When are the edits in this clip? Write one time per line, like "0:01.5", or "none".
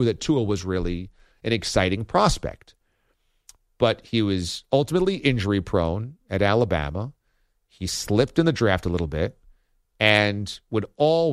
none